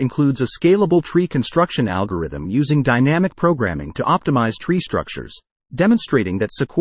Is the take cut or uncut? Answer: uncut